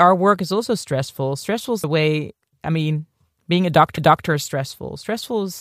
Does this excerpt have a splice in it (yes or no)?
yes